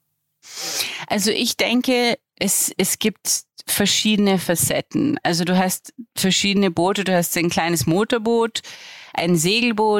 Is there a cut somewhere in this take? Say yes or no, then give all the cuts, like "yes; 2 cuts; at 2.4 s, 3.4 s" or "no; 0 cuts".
yes; 1 cut; at 2.3 s